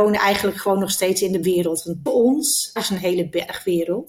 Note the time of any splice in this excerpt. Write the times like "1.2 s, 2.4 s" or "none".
1.4 s, 2.1 s, 2.8 s

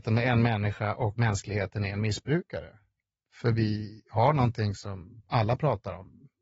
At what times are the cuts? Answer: 1.2 s

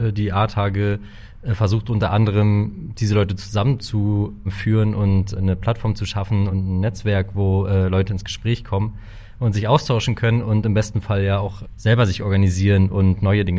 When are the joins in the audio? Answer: none

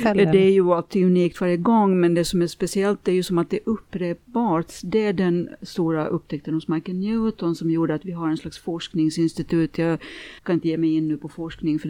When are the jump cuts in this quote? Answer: 10.4 s

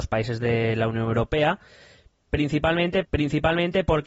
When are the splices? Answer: 3.0 s

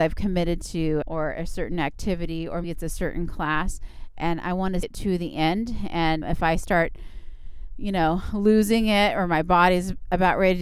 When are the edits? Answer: 1.0 s, 2.6 s, 4.8 s, 6.2 s

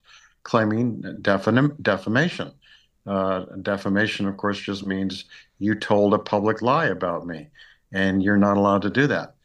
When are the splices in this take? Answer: none

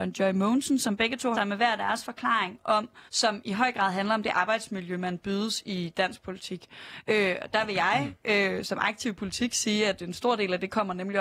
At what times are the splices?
1.3 s, 3.1 s, 8.6 s

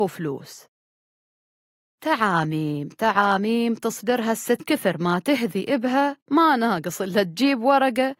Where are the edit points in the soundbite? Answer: 4.6 s, 6.2 s

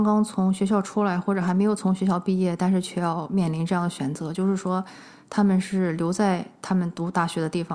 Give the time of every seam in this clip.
none

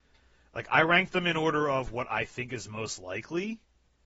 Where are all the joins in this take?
none

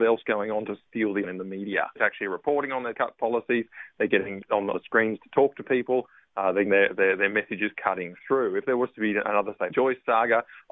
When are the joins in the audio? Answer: 1.2 s, 2.0 s, 2.9 s, 4.4 s, 4.7 s, 6.6 s, 9.7 s

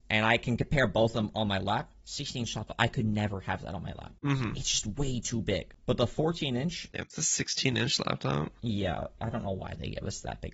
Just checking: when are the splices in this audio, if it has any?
2.0 s, 9.2 s

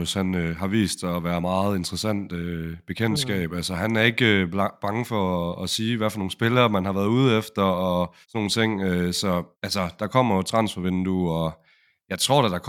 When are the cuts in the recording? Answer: 8.2 s, 9.5 s

